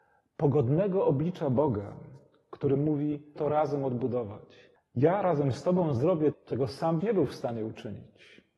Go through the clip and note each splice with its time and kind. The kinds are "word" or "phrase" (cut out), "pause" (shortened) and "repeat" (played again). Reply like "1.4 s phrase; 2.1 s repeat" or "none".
3.4 s word; 6.3 s word; 7.0 s word